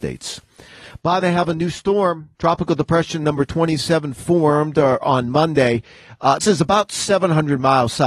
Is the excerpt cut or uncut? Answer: cut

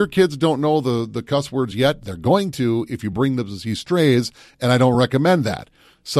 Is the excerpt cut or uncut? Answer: uncut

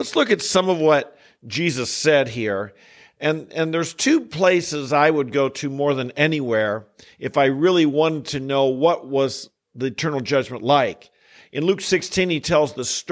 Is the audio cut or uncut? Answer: uncut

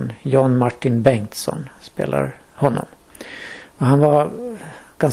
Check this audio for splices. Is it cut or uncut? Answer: uncut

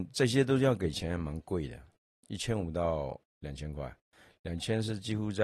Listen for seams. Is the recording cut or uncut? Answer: uncut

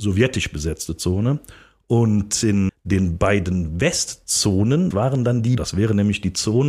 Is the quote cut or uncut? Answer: cut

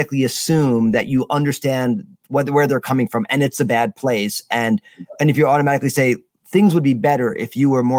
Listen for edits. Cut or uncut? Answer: uncut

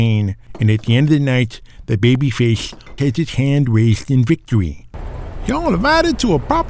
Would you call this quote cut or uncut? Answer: cut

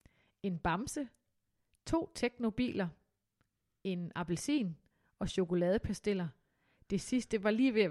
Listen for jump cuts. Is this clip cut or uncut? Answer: uncut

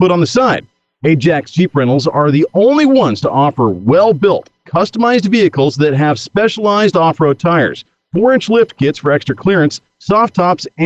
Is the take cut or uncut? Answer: uncut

